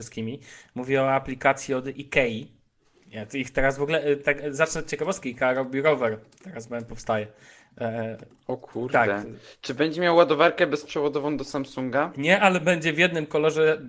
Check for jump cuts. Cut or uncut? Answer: uncut